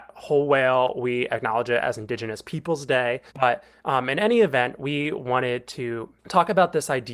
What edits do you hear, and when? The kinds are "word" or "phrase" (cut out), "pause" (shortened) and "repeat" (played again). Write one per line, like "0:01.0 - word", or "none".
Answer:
0:03.3 - pause
0:06.2 - pause